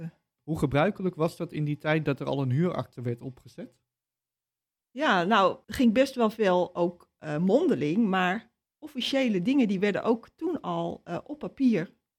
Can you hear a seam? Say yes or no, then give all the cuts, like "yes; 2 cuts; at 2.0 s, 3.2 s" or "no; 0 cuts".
no; 0 cuts